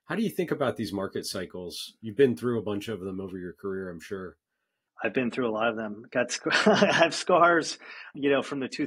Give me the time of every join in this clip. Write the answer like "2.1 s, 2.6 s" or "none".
none